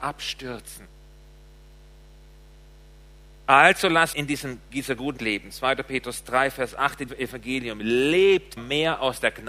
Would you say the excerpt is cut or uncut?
cut